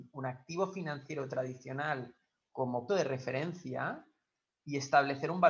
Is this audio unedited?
no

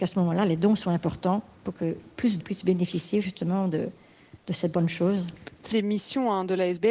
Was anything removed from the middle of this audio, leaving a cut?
yes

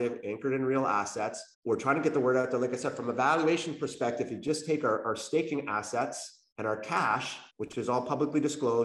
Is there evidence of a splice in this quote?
yes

